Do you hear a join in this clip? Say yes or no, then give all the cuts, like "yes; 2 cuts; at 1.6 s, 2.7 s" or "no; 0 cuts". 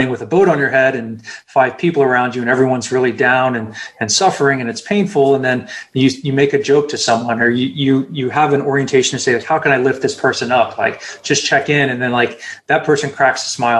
no; 0 cuts